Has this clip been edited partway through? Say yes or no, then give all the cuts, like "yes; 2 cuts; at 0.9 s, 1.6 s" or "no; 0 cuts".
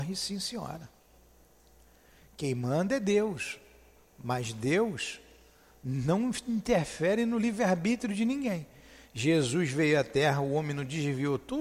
no; 0 cuts